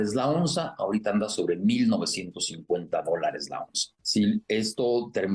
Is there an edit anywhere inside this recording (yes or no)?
no